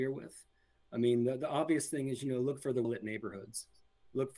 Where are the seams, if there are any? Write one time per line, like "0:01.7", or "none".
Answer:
0:02.8

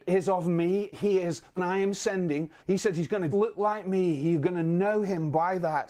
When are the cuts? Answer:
0:00.9
0:01.6
0:02.6
0:03.3

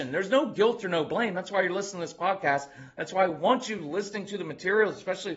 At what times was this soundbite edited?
none

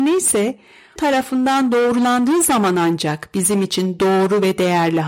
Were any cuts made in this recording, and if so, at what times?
0:01.0

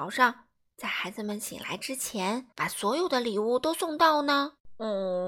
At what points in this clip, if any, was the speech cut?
0:02.5

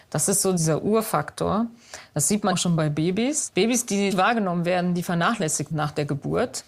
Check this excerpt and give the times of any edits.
0:02.5
0:04.1
0:05.7

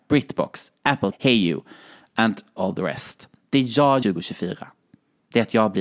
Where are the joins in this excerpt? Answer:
0:01.1
0:02.6
0:04.0

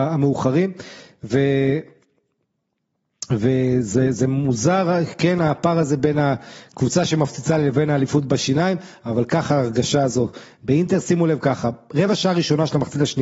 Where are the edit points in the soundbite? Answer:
none

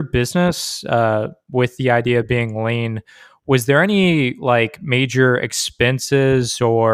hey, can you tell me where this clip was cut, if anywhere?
none

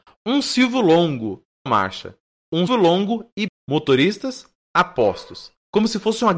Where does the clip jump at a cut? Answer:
0:01.7
0:02.7
0:03.5

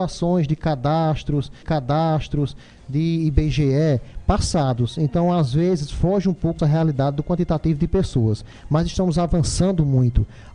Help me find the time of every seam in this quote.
0:01.6
0:06.6

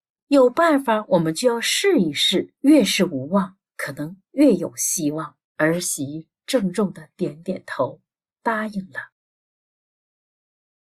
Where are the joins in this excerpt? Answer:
0:02.6
0:05.5

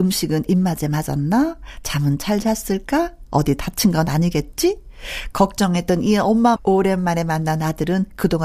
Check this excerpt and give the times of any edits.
0:06.6

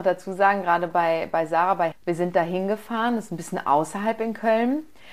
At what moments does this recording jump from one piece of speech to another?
0:01.9

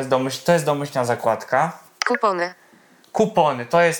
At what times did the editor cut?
none

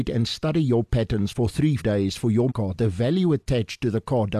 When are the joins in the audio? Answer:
0:01.8
0:02.5

